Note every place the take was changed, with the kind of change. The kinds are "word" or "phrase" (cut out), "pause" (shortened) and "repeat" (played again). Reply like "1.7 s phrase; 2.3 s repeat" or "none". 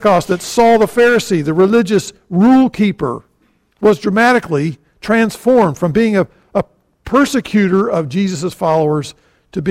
none